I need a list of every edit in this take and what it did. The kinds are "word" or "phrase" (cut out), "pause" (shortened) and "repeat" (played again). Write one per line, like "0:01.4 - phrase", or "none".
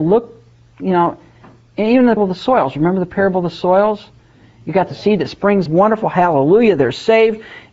0:02.2 - word
0:05.7 - phrase